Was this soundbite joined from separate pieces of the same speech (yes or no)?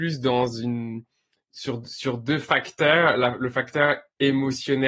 no